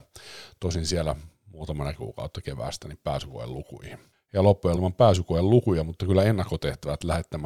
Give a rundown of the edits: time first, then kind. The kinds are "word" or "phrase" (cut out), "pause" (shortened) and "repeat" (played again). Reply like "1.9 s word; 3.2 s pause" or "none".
1.9 s phrase; 4.1 s pause; 4.8 s phrase